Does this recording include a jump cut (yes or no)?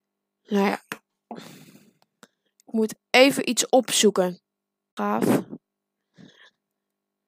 yes